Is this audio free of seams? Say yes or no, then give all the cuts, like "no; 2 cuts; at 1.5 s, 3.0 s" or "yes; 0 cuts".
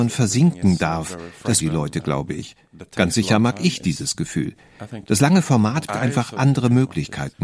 no; 2 cuts; at 1.6 s, 5.9 s